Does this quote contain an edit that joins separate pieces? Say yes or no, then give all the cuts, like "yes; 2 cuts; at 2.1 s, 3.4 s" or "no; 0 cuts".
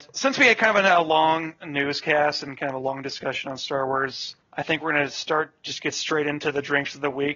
yes; 1 cut; at 4.4 s